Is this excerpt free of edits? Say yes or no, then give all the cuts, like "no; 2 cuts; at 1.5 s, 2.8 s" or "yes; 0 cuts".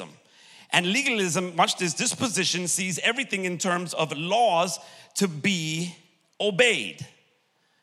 yes; 0 cuts